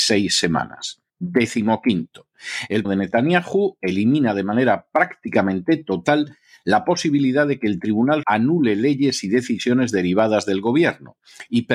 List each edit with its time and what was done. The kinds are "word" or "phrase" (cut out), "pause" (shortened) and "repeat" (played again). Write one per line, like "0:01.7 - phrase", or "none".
0:01.1 - pause
0:02.8 - phrase
0:08.2 - word